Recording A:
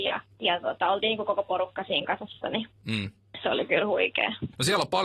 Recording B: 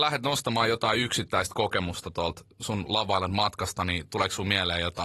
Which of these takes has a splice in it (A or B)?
B